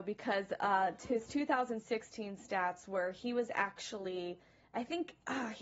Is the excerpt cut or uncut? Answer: uncut